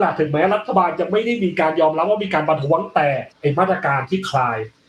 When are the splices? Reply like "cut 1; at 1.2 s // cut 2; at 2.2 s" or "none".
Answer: cut 1; at 3.3 s